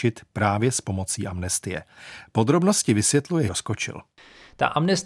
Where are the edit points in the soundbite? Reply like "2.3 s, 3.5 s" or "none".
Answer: 3.5 s